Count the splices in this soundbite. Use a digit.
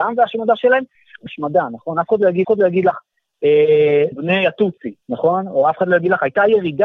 4